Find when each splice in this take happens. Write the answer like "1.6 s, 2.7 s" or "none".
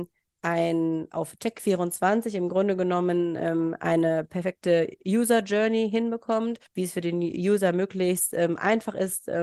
6.7 s